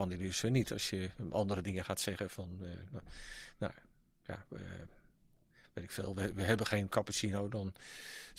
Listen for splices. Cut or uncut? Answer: uncut